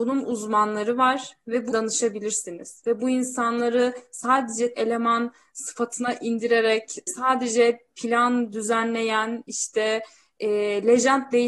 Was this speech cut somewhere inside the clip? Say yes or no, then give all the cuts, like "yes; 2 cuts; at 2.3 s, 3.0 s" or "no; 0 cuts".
yes; 3 cuts; at 1.7 s, 4.7 s, 7.1 s